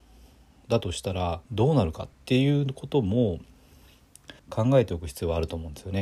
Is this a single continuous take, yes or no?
no